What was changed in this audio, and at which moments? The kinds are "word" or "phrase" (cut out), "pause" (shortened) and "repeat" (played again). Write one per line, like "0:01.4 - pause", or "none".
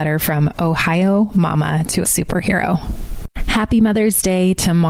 0:02.0 - phrase